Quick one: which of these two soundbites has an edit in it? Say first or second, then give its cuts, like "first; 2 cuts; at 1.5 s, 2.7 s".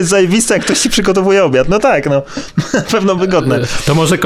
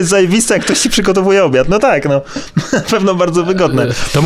first; 1 cut; at 3.2 s